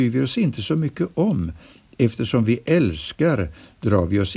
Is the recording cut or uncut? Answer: uncut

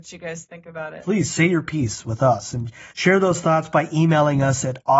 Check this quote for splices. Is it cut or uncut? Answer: cut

